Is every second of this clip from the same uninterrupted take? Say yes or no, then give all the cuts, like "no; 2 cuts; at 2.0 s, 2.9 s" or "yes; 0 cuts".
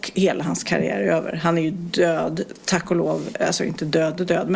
yes; 0 cuts